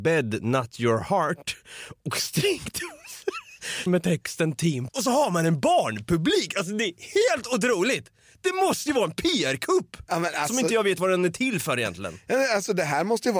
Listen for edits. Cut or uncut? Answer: cut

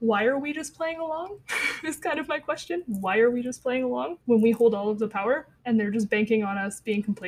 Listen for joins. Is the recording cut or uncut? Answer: cut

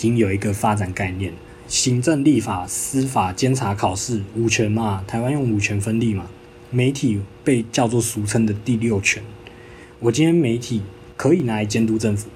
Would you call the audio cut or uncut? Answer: uncut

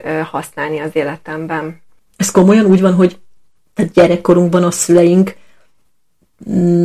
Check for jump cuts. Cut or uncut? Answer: uncut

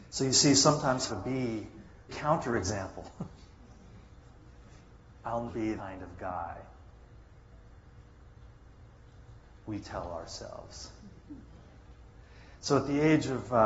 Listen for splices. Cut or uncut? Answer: cut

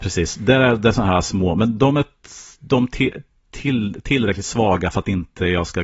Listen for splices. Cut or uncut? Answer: uncut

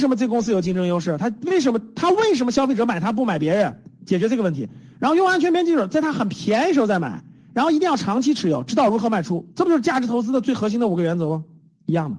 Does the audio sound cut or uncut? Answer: uncut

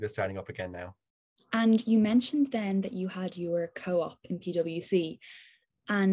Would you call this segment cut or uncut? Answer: uncut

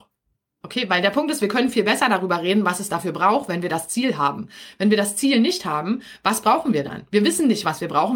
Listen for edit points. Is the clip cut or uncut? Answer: uncut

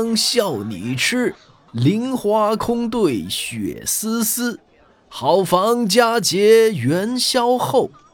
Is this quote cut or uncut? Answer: uncut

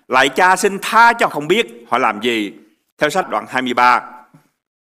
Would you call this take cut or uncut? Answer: cut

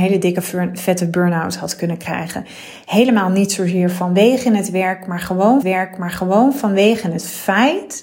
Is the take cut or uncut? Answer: cut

